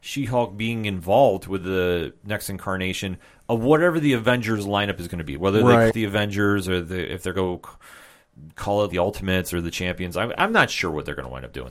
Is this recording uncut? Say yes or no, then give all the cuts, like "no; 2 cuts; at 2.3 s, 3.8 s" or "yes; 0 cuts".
no; 3 cuts; at 5.9 s, 7.3 s, 8.9 s